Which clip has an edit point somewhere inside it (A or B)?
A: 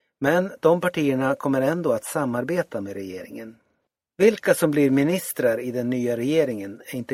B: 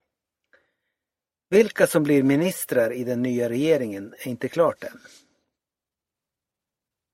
A